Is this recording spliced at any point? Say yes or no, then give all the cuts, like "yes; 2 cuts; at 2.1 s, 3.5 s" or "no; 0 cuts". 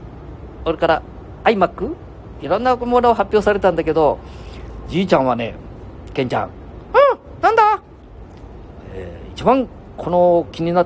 no; 0 cuts